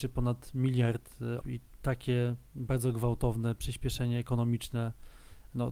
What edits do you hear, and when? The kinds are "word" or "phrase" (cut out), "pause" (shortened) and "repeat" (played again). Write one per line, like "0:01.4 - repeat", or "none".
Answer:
0:01.4 - word
0:02.5 - pause